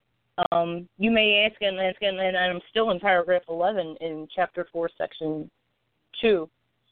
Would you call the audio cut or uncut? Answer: cut